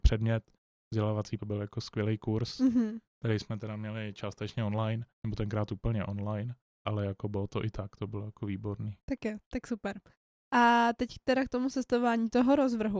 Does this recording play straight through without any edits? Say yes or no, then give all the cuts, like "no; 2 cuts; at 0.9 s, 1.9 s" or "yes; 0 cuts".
no; 4 cuts; at 1.4 s, 5.2 s, 6.9 s, 9.0 s